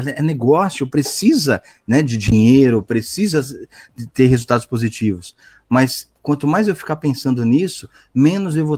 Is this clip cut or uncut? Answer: uncut